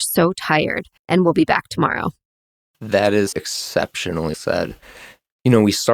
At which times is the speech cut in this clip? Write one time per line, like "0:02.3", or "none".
0:01.0
0:02.5
0:03.3
0:04.3